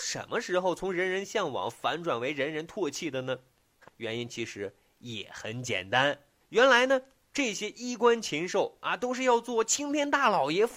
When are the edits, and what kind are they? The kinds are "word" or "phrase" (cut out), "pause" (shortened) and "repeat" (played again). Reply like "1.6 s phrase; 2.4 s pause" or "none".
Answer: 3.9 s word

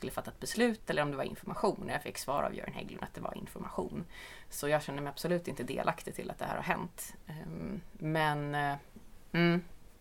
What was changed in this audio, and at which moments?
none

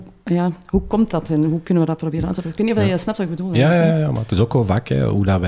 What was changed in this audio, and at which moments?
none

